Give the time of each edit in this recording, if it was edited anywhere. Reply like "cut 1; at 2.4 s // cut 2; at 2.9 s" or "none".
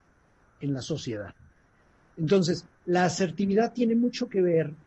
none